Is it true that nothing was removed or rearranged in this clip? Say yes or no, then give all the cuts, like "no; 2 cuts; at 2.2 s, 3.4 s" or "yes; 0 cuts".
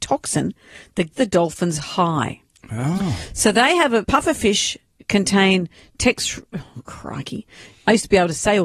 no; 2 cuts; at 1.1 s, 4.0 s